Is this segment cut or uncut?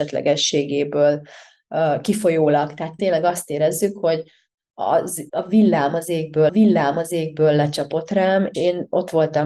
cut